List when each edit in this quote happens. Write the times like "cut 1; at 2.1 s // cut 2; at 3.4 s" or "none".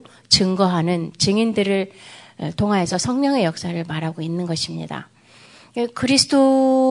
none